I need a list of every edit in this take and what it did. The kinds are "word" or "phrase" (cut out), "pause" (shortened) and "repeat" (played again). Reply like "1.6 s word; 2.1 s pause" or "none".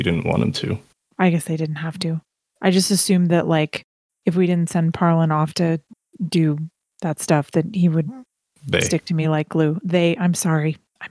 none